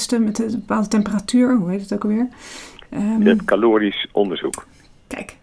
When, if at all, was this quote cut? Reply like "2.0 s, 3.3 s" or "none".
none